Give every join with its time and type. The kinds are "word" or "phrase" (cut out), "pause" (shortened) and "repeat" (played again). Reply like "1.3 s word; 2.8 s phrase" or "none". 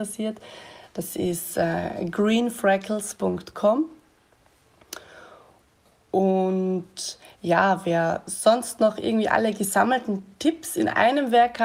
none

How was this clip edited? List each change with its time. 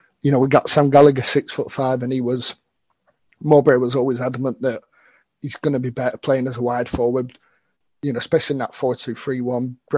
none

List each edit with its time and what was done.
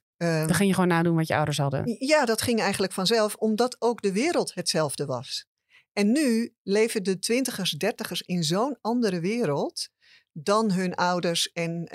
none

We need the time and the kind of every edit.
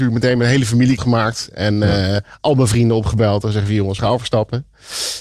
1.0 s word; 4.0 s word

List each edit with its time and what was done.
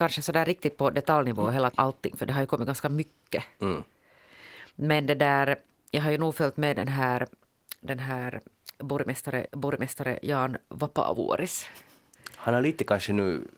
1.7 s word; 9.5 s repeat

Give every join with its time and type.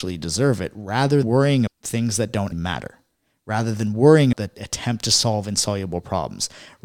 1.2 s word; 1.7 s word; 2.5 s word; 4.3 s word

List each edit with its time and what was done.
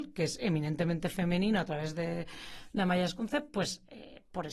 none

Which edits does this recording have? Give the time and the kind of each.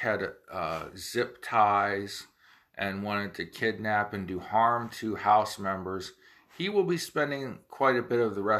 none

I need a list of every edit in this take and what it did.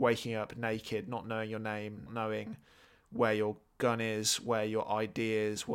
2.1 s word

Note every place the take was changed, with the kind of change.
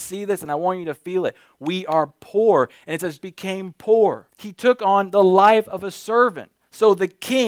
3.2 s word; 4.3 s pause

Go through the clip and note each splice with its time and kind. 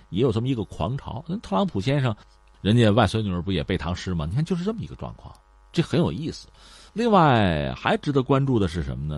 none

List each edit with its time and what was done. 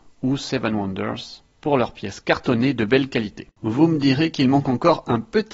3.5 s pause

